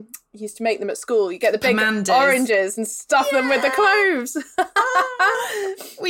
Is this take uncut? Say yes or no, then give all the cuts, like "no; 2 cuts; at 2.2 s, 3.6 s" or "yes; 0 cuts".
yes; 0 cuts